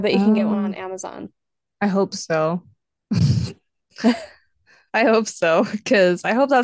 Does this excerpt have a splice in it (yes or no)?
no